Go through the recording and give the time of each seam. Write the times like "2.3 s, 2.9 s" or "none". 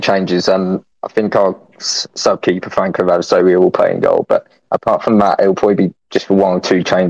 none